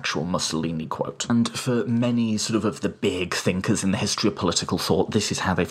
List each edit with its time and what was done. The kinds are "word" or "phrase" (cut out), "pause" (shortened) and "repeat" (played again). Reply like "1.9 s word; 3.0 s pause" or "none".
none

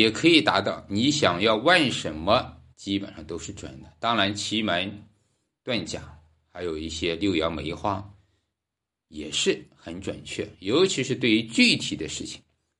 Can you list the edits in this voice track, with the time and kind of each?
2.7 s pause

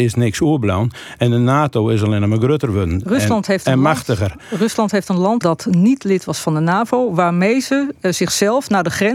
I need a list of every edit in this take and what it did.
5.4 s word

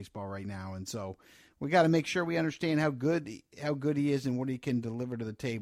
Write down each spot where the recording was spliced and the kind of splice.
none

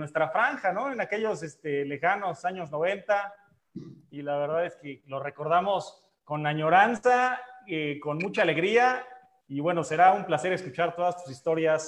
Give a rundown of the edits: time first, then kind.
none

